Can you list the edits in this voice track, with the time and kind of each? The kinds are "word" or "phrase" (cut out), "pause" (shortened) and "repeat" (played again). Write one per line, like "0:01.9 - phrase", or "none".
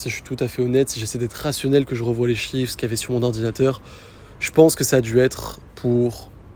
none